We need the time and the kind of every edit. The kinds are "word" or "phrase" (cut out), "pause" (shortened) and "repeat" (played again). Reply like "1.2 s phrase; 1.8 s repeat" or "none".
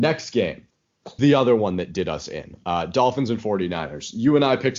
1.2 s phrase